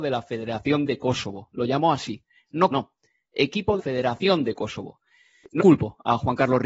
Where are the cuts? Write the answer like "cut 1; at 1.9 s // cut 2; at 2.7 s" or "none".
cut 1; at 2.7 s // cut 2; at 3.8 s // cut 3; at 5.6 s

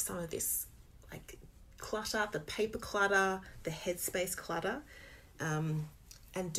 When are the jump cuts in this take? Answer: none

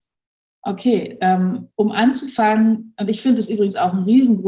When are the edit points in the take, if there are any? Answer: none

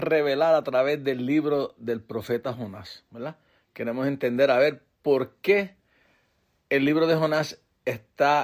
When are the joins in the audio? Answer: none

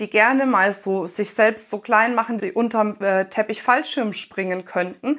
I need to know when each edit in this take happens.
cut 1; at 2.4 s

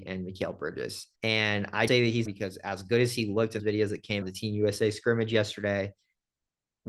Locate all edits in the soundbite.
cut 1; at 1.1 s // cut 2; at 1.9 s // cut 3; at 2.3 s // cut 4; at 3.6 s // cut 5; at 4.2 s

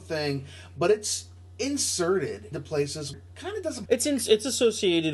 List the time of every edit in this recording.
cut 1; at 2.5 s // cut 2; at 3.1 s // cut 3; at 3.9 s

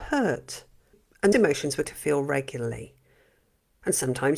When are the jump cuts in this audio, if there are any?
cut 1; at 1.3 s // cut 2; at 1.9 s

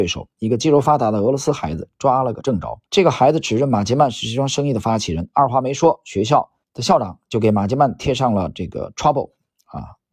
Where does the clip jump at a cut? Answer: cut 1; at 2.9 s // cut 2; at 6.6 s

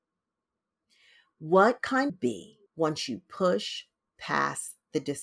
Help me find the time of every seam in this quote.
cut 1; at 2.1 s // cut 2; at 2.7 s

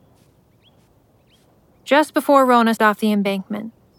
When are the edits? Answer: cut 1; at 2.8 s

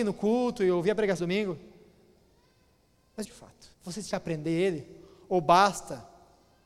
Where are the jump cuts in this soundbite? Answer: cut 1; at 1.2 s // cut 2; at 3.2 s // cut 3; at 3.7 s // cut 4; at 4.1 s

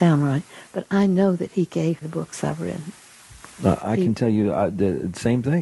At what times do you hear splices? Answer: cut 1; at 2.0 s

